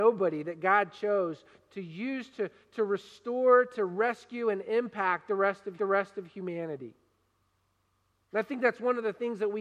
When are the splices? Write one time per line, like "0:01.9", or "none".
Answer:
0:05.8